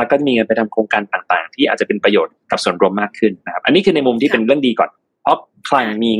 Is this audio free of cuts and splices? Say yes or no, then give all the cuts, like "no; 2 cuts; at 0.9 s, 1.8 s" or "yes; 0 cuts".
yes; 0 cuts